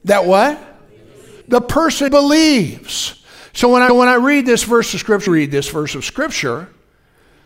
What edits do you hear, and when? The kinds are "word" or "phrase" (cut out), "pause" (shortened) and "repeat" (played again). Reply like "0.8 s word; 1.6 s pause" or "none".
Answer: 1.4 s pause; 2.1 s word; 3.9 s repeat; 5.3 s phrase